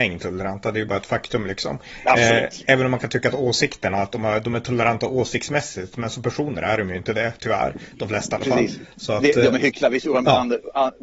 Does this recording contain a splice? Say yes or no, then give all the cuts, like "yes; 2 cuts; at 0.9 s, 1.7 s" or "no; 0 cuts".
no; 0 cuts